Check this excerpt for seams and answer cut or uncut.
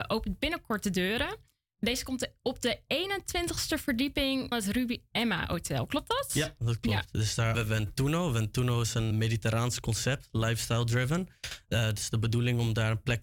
cut